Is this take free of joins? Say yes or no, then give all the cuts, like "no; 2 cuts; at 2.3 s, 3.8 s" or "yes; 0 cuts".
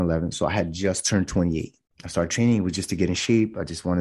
yes; 0 cuts